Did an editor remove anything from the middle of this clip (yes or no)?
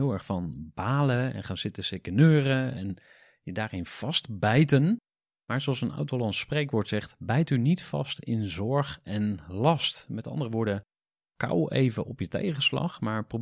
no